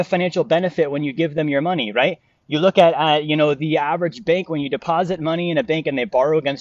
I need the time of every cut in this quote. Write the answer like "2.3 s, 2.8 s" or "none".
none